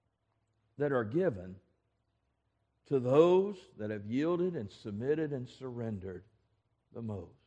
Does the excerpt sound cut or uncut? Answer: uncut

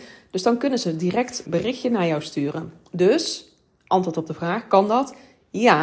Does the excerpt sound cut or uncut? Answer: cut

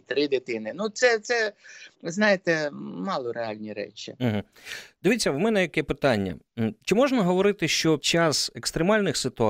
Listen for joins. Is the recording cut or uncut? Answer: cut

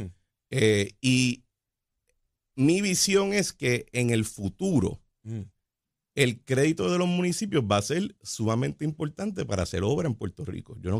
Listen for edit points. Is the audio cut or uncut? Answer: uncut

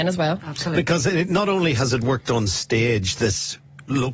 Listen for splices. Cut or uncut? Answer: uncut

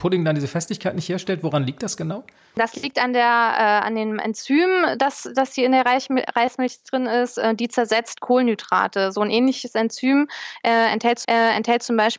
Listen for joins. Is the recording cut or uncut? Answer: cut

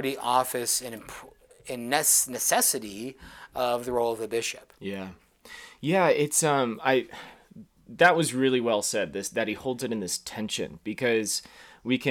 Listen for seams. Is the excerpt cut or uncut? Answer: uncut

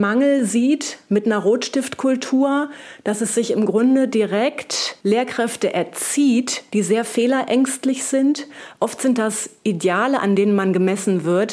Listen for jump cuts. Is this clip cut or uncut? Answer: cut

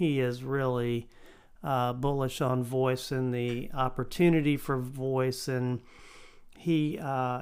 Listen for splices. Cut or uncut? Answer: uncut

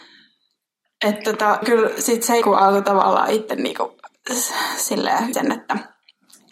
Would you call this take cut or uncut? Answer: cut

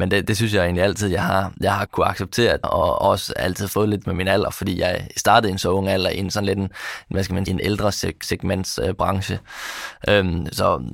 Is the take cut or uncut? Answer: cut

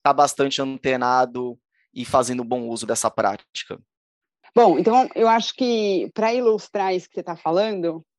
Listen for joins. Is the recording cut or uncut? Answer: uncut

